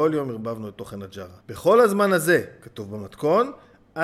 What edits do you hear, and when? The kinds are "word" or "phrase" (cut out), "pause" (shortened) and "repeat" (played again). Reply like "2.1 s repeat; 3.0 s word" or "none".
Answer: 1.4 s pause